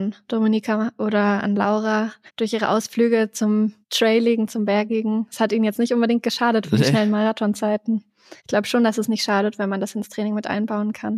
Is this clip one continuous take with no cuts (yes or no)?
no